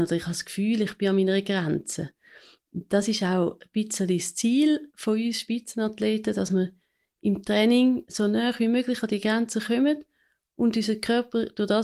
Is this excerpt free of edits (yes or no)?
yes